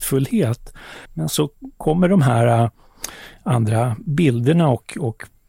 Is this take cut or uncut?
cut